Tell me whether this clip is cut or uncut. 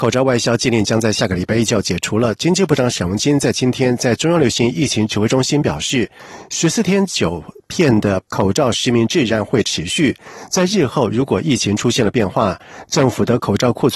cut